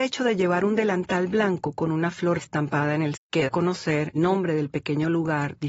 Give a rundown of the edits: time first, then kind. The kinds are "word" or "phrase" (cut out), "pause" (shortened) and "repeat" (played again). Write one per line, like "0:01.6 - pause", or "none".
0:02.4 - word
0:03.1 - word
0:03.5 - word
0:04.1 - word